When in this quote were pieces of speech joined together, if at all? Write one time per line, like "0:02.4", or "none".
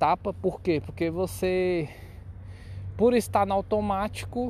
none

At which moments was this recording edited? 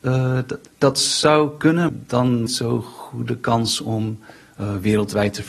0:01.9
0:02.5

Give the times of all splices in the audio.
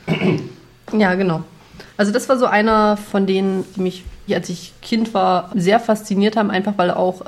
0:01.9
0:03.7
0:04.3
0:04.8
0:05.5

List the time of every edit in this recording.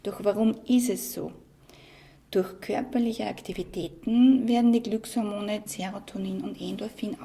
0:05.7

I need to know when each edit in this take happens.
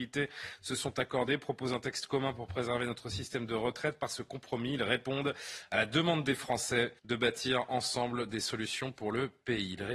0:07.0

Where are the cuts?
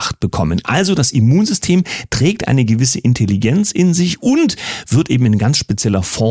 none

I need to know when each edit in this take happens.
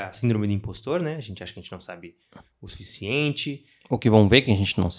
none

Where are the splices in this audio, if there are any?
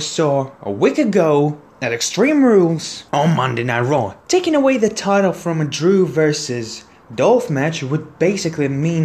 0:03.1
0:04.2

